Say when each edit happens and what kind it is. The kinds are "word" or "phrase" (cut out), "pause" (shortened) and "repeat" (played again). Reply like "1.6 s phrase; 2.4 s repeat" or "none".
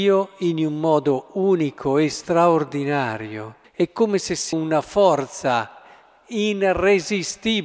3.6 s pause; 4.5 s phrase